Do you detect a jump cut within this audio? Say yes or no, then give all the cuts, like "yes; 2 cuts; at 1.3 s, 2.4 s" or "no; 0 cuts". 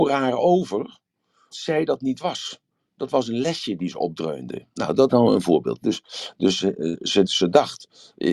yes; 3 cuts; at 1.5 s, 5.1 s, 7.3 s